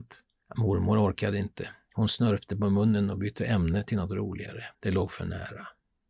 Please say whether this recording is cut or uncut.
cut